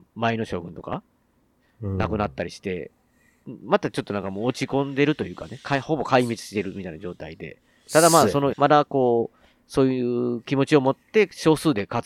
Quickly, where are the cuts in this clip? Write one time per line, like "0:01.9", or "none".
0:08.5